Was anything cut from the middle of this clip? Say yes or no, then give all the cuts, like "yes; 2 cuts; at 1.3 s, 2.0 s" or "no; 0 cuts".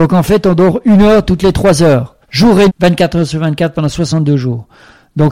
yes; 2 cuts; at 2.2 s, 2.7 s